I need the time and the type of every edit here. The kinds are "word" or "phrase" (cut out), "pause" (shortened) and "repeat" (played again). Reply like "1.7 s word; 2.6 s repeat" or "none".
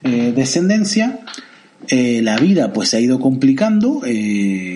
none